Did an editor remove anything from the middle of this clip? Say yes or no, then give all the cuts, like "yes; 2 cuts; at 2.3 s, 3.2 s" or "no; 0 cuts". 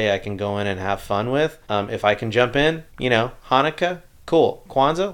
yes; 2 cuts; at 1.6 s, 2.9 s